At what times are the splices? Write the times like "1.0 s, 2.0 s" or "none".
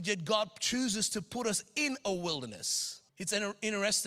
3.1 s